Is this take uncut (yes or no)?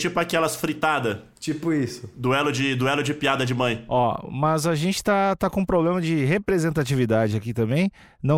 yes